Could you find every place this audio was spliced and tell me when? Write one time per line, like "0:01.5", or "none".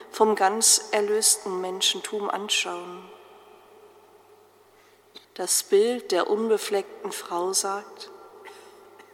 0:05.2